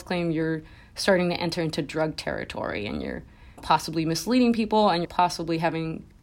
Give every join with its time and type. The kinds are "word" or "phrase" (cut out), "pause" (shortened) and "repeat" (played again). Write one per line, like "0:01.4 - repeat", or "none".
0:03.6 - word
0:05.0 - phrase